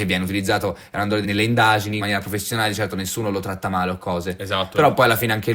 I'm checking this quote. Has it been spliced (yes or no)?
yes